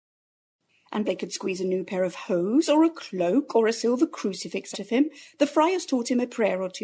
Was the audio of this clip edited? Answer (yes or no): yes